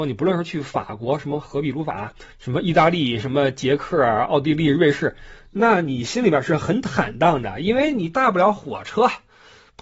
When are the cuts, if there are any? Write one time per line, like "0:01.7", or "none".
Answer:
0:02.3